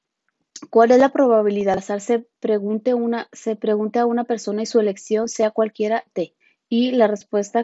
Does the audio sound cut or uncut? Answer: cut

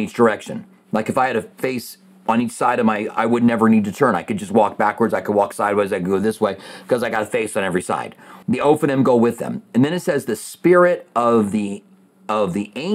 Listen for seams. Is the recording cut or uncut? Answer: cut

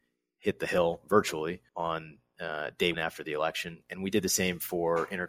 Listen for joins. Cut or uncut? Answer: cut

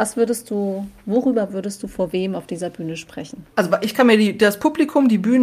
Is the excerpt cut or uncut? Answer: cut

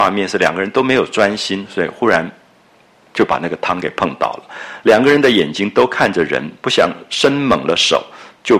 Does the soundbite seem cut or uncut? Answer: uncut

